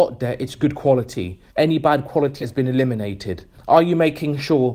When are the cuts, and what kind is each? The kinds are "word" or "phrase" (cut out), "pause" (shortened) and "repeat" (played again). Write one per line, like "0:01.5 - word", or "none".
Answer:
0:01.5 - pause
0:02.4 - word
0:03.5 - pause